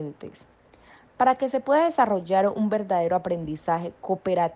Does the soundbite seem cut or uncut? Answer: uncut